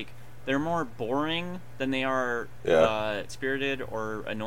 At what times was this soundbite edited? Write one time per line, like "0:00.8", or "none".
0:03.3